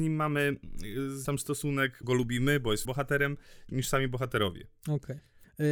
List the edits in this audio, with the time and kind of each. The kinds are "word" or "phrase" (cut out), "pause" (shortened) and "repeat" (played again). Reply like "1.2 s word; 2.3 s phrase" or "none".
1.2 s word; 2.0 s word; 2.8 s word; 3.7 s word